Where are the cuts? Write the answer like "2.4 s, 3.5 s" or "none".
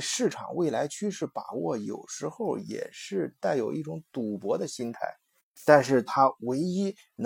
none